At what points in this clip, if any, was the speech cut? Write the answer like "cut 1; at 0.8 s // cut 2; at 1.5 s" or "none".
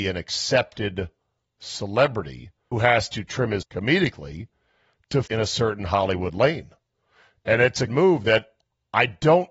cut 1; at 2.7 s // cut 2; at 3.6 s // cut 3; at 5.3 s // cut 4; at 7.9 s